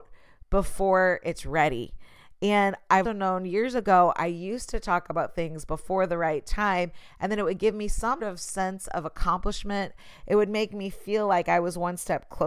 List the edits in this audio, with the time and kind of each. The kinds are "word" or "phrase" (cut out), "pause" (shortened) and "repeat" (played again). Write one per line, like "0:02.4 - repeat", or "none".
0:03.0 - word
0:08.2 - word